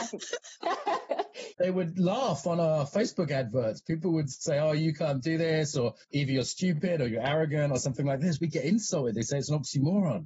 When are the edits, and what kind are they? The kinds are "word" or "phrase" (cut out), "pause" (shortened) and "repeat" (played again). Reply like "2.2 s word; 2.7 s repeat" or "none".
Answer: 6.0 s pause